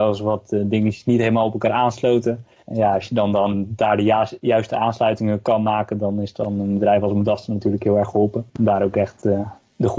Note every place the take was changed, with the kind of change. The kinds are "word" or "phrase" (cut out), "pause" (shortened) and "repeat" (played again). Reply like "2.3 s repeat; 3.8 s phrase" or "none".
8.5 s pause